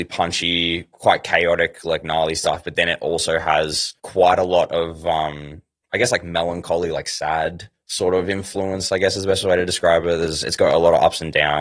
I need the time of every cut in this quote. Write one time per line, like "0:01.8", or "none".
0:04.0
0:07.8